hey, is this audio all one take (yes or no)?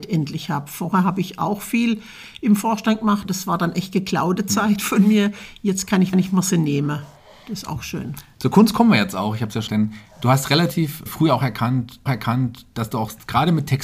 no